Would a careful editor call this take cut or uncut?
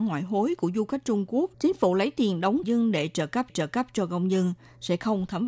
cut